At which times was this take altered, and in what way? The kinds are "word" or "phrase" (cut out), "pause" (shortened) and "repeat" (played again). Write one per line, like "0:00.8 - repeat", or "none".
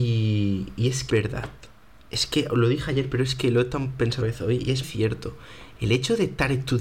0:01.1 - word
0:04.2 - word
0:04.8 - word